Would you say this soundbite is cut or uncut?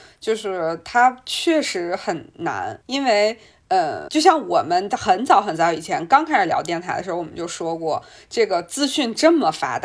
cut